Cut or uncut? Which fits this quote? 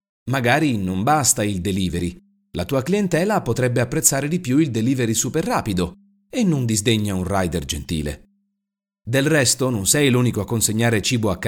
uncut